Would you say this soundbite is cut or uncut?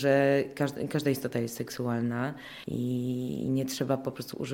uncut